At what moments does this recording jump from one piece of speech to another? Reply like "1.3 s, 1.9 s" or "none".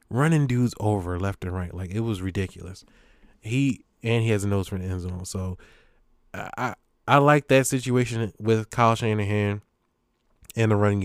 none